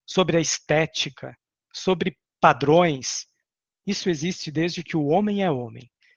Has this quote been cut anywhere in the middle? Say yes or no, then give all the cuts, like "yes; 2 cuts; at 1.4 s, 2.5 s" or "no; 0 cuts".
no; 0 cuts